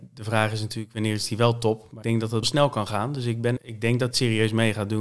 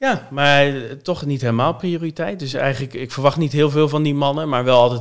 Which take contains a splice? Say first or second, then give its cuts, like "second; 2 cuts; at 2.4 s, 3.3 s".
first; 4 cuts; at 2.0 s, 2.4 s, 3.6 s, 4.1 s